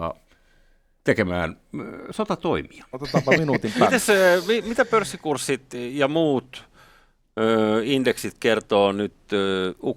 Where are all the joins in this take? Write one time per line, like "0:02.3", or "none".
none